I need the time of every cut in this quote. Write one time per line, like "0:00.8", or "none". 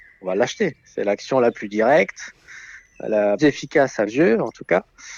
0:03.4
0:04.1